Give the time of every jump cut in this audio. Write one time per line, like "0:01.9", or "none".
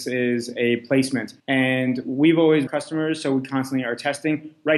0:01.4
0:02.7